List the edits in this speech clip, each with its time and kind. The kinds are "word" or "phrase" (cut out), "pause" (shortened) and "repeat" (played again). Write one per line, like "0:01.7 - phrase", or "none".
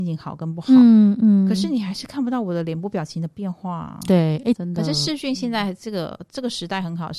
0:04.5 - phrase